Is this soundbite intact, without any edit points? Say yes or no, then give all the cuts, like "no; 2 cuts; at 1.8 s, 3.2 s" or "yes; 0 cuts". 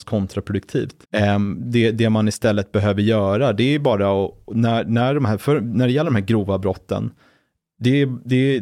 no; 1 cut; at 1.0 s